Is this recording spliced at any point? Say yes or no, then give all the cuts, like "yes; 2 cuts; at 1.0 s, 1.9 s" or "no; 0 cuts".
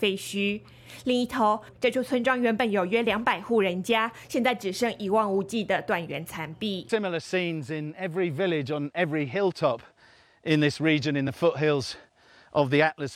no; 0 cuts